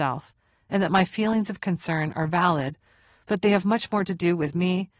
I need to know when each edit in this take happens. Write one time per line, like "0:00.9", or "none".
none

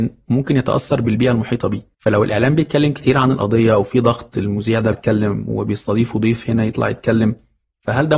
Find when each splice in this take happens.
0:01.9
0:04.9

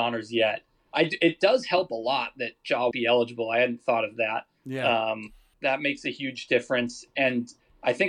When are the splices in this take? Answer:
0:02.9
0:05.5

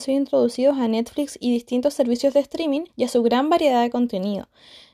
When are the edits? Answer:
0:02.9

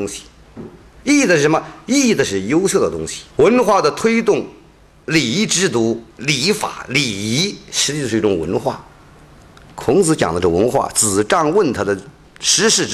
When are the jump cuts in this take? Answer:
0:03.3
0:06.1

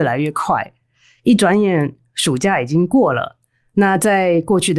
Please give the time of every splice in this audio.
none

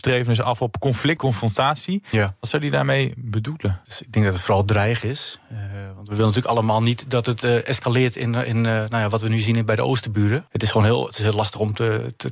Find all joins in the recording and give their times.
0:01.2

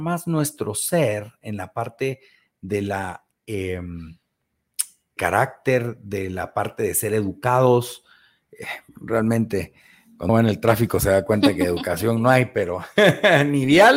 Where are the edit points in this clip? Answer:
0:05.2
0:10.3

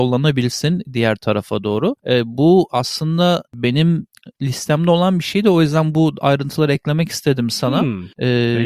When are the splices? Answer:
none

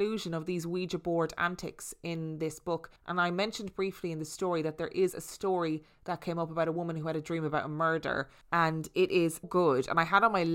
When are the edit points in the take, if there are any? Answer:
0:03.0
0:08.4
0:09.4

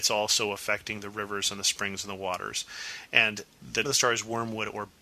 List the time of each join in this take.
0:03.8

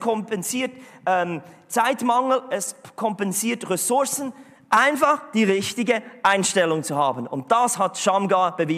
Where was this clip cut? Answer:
none

